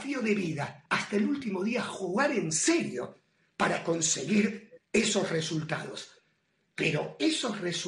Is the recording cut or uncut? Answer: uncut